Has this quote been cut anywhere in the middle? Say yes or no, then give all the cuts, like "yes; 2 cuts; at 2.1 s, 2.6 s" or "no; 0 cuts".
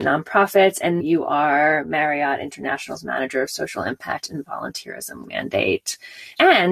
yes; 2 cuts; at 1.0 s, 5.2 s